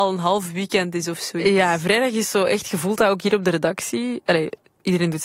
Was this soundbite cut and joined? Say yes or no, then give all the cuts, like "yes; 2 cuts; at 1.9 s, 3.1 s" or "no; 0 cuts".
no; 0 cuts